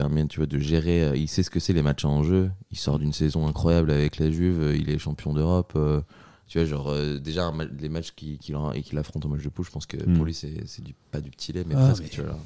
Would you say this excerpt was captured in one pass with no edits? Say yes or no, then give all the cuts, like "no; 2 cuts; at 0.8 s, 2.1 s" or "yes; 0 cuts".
yes; 0 cuts